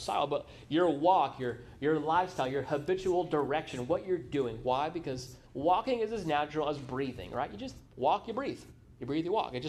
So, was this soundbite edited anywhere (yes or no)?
yes